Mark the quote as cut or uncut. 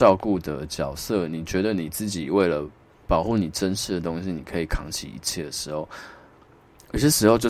uncut